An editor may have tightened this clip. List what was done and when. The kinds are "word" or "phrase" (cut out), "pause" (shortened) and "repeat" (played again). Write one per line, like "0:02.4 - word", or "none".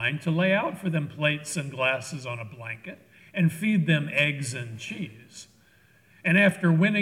none